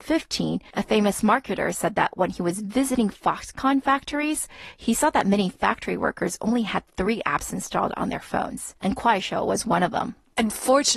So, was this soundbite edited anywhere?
yes; 1 cut; at 8.8 s

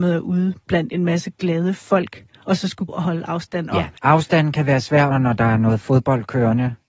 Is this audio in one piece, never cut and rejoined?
no; 3 cuts; at 2.9 s, 4.0 s, 5.1 s

